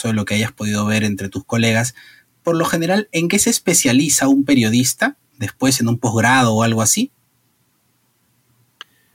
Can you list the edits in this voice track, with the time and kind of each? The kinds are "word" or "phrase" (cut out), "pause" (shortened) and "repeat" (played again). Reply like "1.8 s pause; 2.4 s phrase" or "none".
none